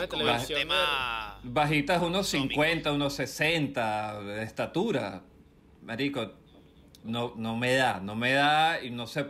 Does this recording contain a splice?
no; 0 cuts

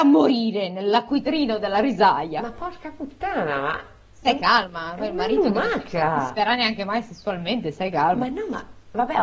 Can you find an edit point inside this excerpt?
no; 0 cuts

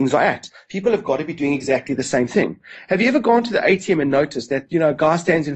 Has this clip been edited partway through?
no; 0 cuts

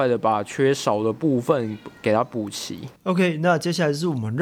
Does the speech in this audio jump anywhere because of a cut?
yes; 1 cut; at 3.0 s

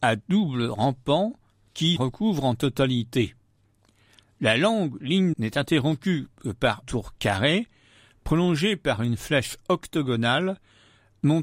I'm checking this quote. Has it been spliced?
yes; 3 cuts; at 2.0 s, 5.3 s, 6.8 s

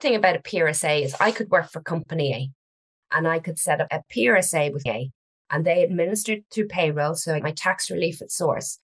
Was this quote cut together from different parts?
yes; 3 cuts; at 3.9 s, 4.9 s, 7.4 s

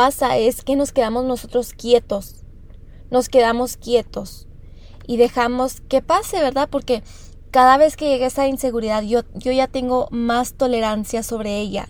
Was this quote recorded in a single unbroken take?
no; 1 cut; at 5.8 s

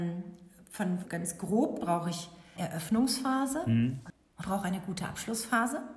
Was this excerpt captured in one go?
no; 4 cuts; at 1.0 s, 1.8 s, 2.6 s, 4.4 s

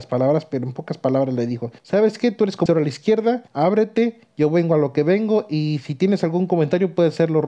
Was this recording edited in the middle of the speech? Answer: yes; 3 cuts; at 1.8 s, 2.7 s, 3.5 s

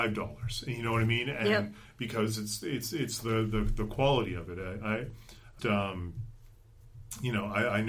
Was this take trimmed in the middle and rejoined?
yes; 1 cut; at 5.6 s

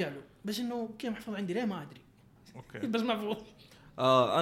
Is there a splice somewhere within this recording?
no; 0 cuts

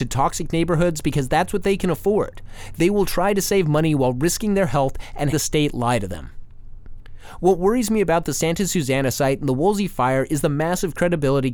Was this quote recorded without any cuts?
no; 1 cut; at 5.3 s

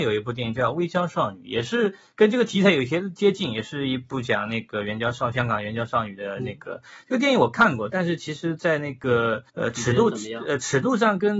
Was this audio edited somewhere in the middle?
yes; 1 cut; at 9.5 s

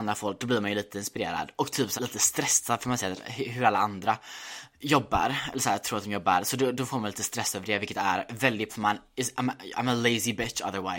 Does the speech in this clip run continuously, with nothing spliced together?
no; 2 cuts; at 2.0 s, 8.7 s

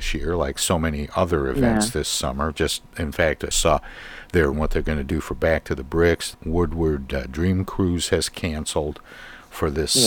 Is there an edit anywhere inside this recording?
yes; 3 cuts; at 3.5 s, 4.5 s, 6.3 s

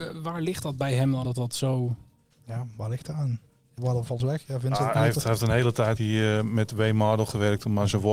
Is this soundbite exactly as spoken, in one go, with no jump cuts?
no; 5 cuts; at 1.2 s, 3.8 s, 4.2 s, 4.9 s, 6.0 s

